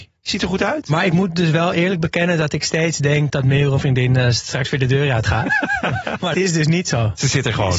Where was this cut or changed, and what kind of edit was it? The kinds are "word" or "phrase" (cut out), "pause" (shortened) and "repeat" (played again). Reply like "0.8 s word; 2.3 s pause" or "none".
3.3 s word; 3.8 s word; 6.3 s word